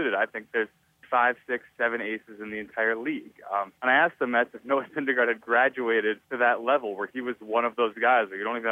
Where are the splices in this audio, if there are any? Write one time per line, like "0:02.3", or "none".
0:01.0
0:03.8
0:06.2